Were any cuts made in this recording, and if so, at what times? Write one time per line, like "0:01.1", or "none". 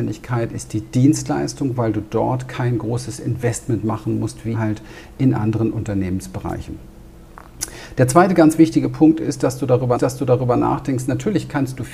0:04.5
0:09.9